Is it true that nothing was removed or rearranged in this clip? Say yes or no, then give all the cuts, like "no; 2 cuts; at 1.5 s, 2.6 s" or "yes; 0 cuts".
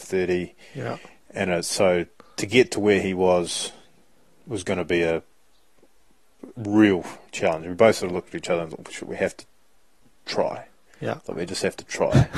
yes; 0 cuts